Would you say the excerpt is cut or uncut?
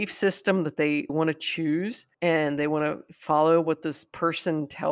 cut